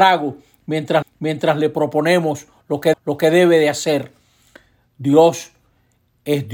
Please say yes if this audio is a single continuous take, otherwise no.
no